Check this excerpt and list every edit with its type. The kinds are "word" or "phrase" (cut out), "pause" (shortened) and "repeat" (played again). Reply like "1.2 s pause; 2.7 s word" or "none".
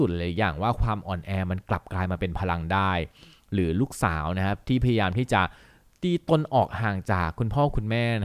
none